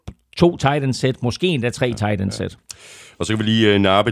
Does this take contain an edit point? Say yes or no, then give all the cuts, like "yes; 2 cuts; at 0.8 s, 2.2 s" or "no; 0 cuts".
no; 0 cuts